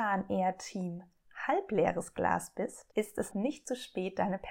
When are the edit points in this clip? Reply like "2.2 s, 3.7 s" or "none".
2.9 s, 3.3 s